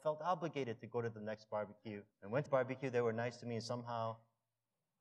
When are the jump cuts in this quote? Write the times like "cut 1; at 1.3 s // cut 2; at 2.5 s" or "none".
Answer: cut 1; at 2.1 s // cut 2; at 2.5 s